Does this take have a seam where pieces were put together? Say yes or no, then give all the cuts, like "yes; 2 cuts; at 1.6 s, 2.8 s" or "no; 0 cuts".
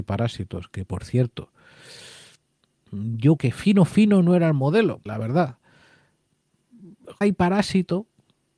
yes; 3 cuts; at 3.4 s, 5.1 s, 7.2 s